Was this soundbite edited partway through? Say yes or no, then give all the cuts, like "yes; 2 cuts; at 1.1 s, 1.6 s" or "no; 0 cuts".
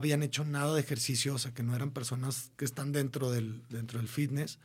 yes; 1 cut; at 2.5 s